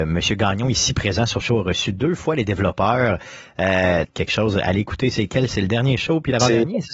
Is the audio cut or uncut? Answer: cut